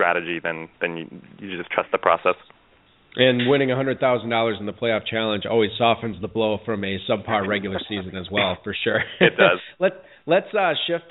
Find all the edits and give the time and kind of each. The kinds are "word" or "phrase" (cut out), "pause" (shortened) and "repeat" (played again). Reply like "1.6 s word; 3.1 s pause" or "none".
none